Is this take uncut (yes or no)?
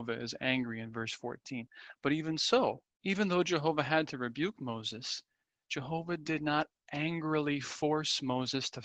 no